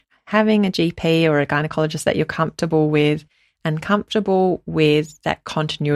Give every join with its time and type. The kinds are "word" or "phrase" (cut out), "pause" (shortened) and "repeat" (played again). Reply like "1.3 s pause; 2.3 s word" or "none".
none